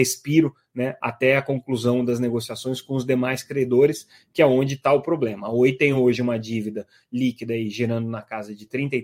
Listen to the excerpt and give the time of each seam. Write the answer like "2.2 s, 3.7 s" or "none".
none